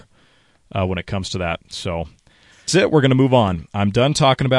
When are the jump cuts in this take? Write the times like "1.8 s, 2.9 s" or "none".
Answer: 2.7 s